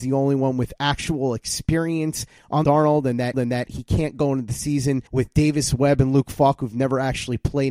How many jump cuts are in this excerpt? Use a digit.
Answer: 3